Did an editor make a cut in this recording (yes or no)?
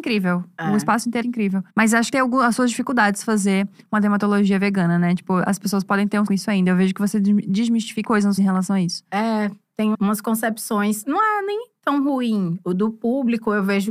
yes